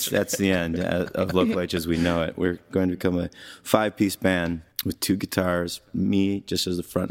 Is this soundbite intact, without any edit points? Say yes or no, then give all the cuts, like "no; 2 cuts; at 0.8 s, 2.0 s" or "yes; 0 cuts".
no; 1 cut; at 4.7 s